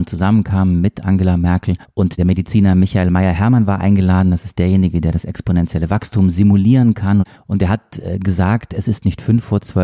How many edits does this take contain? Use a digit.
2